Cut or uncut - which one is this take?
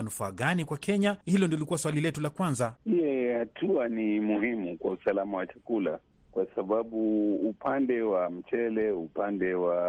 cut